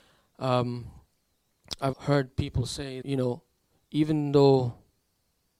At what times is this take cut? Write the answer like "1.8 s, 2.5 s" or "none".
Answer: 1.9 s, 3.0 s